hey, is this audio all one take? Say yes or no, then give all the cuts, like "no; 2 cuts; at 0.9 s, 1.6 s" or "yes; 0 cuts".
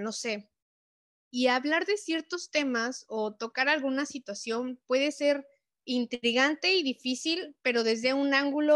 yes; 0 cuts